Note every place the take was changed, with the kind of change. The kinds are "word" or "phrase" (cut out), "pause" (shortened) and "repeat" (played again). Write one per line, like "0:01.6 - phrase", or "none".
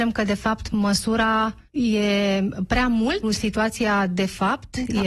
0:01.7 - pause
0:03.2 - word